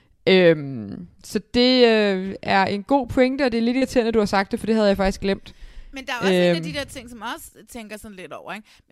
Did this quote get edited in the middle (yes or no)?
no